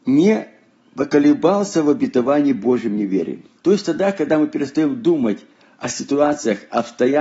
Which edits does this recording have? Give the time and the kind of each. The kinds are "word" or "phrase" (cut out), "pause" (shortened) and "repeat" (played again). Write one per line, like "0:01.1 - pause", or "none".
0:03.6 - pause